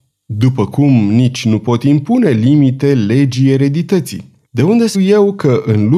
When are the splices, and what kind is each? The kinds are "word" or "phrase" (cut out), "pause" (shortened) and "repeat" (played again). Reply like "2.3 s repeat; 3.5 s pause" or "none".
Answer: 4.4 s pause; 4.9 s word